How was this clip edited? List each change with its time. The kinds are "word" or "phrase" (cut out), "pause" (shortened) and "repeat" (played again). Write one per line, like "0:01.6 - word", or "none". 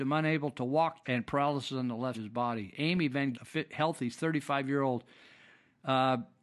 0:01.0 - word
0:02.1 - word
0:03.3 - word